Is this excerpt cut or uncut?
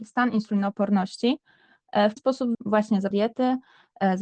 cut